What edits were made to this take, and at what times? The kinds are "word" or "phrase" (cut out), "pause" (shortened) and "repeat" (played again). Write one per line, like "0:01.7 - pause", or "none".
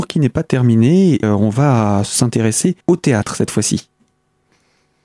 0:01.2 - word
0:02.8 - pause